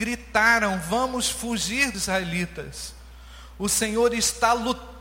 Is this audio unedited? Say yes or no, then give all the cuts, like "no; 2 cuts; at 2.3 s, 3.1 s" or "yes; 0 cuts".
no; 1 cut; at 1.9 s